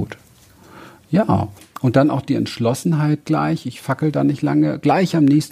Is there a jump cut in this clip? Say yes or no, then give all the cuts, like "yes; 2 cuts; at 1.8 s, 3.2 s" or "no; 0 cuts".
yes; 1 cut; at 1.6 s